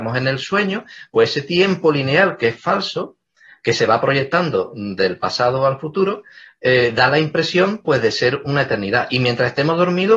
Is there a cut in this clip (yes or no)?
no